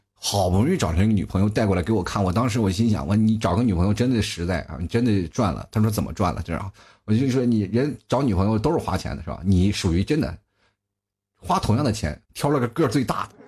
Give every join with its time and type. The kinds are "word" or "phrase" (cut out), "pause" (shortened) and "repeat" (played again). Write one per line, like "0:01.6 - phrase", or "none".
0:12.2 - pause